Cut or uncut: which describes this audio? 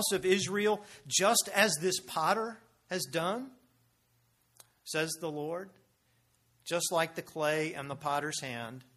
uncut